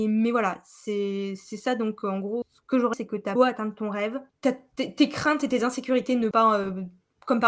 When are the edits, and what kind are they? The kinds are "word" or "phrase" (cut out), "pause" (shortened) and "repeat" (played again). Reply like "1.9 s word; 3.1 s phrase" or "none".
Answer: 2.4 s word; 2.9 s word; 3.4 s word; 4.3 s pause; 6.3 s word